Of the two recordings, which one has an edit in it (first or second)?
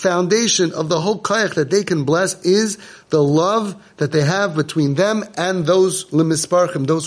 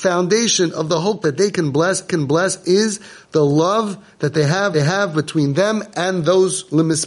second